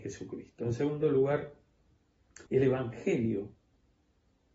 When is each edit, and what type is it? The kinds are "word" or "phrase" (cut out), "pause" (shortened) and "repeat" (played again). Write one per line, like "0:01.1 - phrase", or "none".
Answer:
0:02.5 - pause